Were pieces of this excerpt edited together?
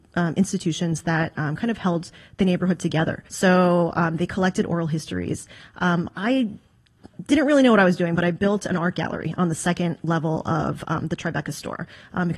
yes; 1 cut; at 3.3 s

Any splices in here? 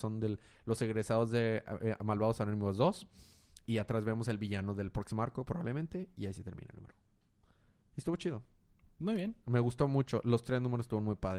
no; 0 cuts

